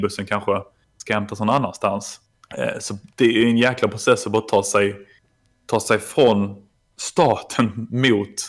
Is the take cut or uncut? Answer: uncut